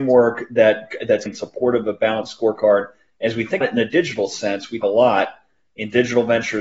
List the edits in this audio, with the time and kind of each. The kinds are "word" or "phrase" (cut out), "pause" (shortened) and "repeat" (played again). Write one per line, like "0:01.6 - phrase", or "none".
0:01.3 - word
0:03.6 - word
0:04.8 - word